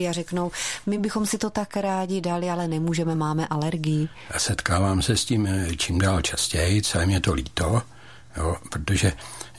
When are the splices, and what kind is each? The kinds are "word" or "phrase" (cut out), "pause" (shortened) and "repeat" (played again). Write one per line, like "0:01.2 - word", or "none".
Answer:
none